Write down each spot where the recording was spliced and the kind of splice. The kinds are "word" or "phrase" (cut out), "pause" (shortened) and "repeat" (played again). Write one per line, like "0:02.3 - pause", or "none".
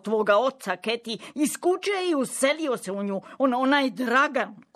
none